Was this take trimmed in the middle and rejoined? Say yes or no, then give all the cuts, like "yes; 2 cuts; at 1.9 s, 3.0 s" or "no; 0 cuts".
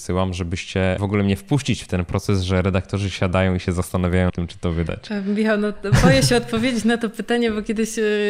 yes; 2 cuts; at 1.0 s, 4.3 s